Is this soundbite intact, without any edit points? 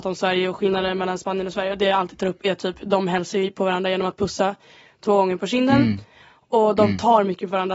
yes; 0 cuts

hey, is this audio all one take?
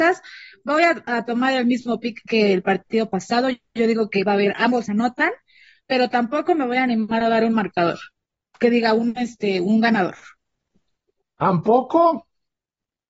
yes; 0 cuts

